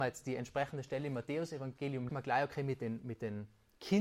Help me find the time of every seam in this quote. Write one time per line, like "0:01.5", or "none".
0:02.1